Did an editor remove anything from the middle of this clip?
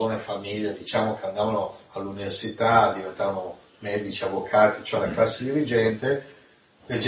no; 0 cuts

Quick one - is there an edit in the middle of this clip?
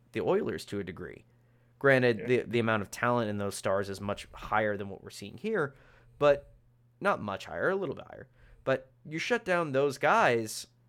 no; 0 cuts

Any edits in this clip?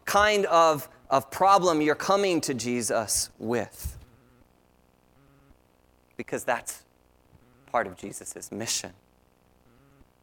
no; 0 cuts

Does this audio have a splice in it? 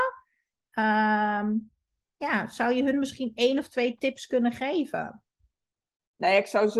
no; 0 cuts

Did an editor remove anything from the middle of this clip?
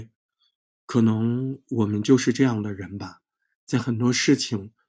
no; 0 cuts

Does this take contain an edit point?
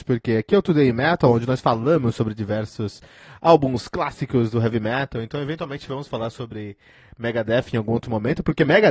no; 0 cuts

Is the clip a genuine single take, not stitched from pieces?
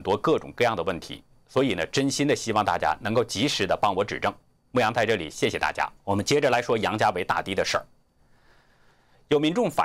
no; 1 cut; at 6.0 s

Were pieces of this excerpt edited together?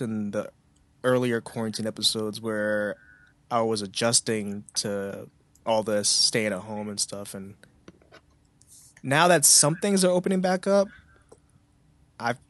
no; 0 cuts

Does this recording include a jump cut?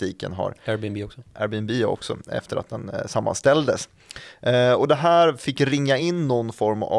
no; 0 cuts

